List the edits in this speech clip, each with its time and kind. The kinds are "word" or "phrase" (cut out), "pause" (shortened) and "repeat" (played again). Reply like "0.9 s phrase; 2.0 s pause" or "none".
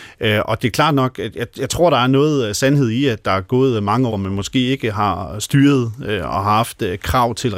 4.1 s word